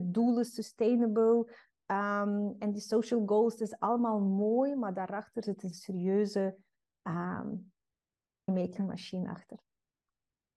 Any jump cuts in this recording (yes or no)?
yes